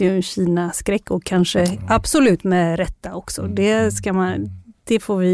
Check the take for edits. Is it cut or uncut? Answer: uncut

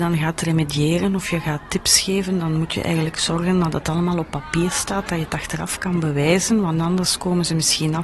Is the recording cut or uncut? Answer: uncut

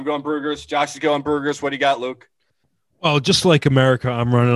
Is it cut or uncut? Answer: uncut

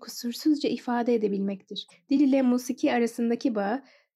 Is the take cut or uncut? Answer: uncut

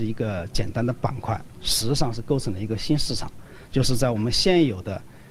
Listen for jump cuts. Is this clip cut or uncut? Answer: uncut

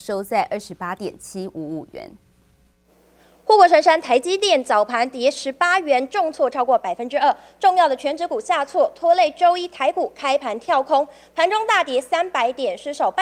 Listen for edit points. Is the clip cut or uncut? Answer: uncut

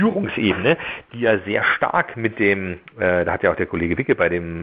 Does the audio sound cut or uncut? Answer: uncut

